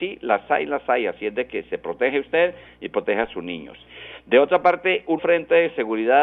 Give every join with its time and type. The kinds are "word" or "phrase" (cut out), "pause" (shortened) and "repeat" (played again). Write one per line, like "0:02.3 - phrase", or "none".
0:05.2 - word